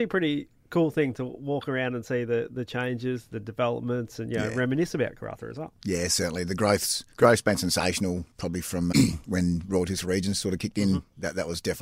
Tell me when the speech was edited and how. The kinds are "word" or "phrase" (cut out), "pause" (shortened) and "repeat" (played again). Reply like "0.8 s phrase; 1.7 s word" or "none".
7.1 s pause; 8.3 s pause; 8.9 s word